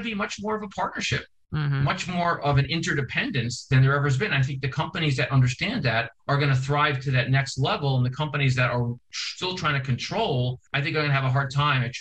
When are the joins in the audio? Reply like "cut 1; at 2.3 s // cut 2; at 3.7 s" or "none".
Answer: cut 1; at 6.2 s // cut 2; at 10.7 s